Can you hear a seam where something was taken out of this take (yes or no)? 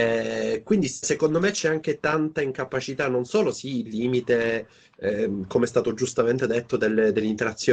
yes